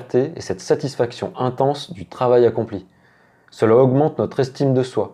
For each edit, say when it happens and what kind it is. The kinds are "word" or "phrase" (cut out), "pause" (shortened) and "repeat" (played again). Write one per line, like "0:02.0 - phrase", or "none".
none